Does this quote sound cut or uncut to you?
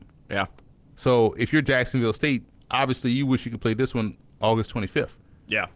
uncut